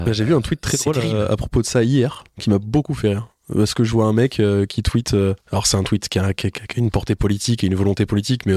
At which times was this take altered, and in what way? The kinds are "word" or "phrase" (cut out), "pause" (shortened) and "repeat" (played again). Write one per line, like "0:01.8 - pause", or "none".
0:05.4 - pause